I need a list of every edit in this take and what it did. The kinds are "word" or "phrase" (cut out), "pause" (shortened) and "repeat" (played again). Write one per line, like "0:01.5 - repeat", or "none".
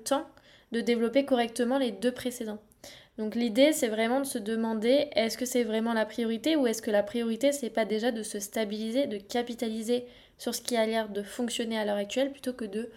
none